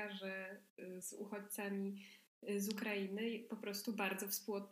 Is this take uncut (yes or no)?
yes